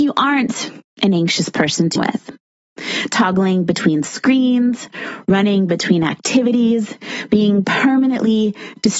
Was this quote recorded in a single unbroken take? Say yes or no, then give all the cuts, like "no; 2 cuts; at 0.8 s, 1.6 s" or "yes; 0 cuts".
no; 1 cut; at 2.0 s